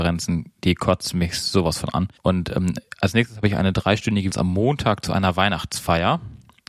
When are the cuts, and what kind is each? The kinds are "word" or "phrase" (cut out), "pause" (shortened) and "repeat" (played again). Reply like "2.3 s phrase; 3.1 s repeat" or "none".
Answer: 2.2 s pause; 4.3 s word